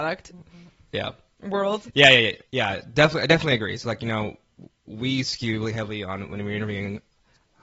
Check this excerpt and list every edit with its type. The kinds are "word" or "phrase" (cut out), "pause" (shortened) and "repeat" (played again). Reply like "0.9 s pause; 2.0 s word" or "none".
2.5 s pause